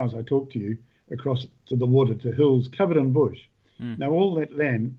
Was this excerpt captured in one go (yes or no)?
no